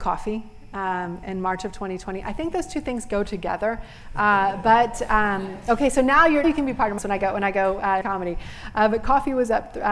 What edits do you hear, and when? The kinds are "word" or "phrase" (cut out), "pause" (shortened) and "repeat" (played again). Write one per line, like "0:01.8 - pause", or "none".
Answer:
0:06.4 - word
0:07.0 - word
0:08.0 - word